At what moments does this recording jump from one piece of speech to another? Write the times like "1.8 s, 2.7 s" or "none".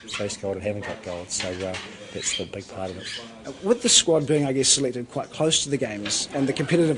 none